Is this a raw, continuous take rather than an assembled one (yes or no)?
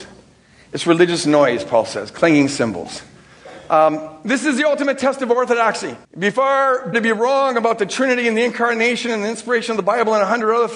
no